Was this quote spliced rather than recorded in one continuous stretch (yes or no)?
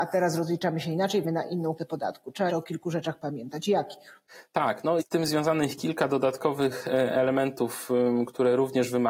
yes